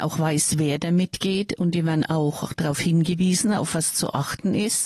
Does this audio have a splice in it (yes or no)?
no